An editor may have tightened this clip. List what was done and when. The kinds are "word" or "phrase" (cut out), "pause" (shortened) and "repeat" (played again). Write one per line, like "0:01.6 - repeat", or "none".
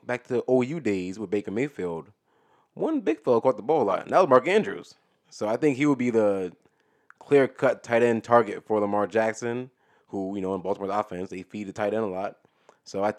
none